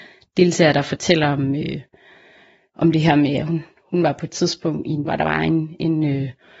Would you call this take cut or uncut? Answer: cut